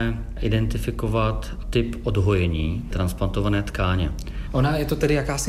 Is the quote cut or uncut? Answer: cut